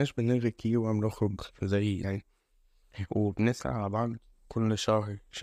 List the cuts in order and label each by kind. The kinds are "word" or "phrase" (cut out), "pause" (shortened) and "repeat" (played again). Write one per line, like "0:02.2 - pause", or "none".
0:02.0 - word